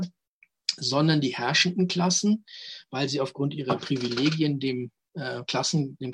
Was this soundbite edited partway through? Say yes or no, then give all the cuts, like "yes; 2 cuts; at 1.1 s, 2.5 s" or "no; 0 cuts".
no; 0 cuts